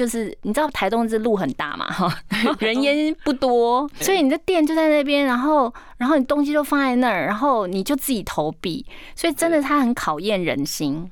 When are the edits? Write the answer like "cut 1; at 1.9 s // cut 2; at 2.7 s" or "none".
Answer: cut 1; at 2.6 s // cut 2; at 4.0 s